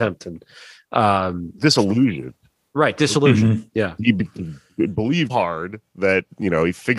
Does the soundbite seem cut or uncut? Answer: cut